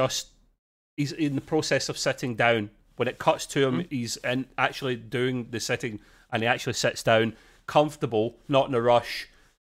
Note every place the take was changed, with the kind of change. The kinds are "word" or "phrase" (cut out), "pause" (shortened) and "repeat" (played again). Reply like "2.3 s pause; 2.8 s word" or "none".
none